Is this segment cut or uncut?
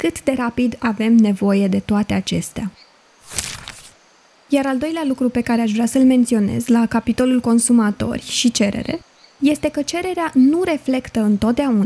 uncut